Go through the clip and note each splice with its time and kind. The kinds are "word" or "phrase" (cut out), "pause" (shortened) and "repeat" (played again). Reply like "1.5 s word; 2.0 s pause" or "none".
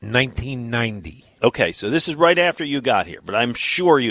none